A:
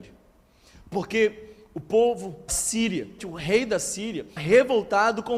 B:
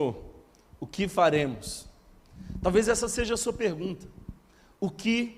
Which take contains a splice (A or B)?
A